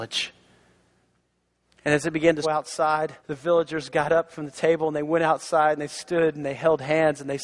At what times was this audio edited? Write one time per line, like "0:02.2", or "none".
0:02.4
0:03.2